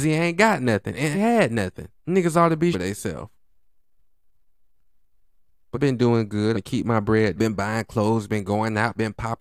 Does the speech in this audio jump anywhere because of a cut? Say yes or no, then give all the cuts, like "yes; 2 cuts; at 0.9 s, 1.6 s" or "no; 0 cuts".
yes; 6 cuts; at 1.1 s, 2.0 s, 2.7 s, 5.7 s, 6.5 s, 7.4 s